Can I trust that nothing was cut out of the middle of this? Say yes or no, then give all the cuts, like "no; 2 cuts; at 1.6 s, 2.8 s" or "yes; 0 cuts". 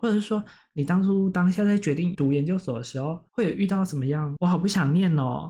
no; 1 cut; at 3.3 s